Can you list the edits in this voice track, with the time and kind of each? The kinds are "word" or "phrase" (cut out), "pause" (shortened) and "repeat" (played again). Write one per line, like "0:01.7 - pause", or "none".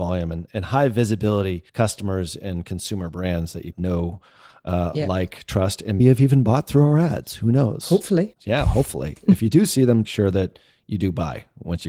0:01.7 - pause
0:03.7 - word
0:06.0 - word
0:10.0 - phrase